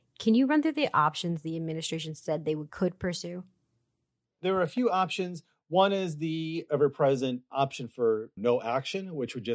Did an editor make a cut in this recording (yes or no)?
no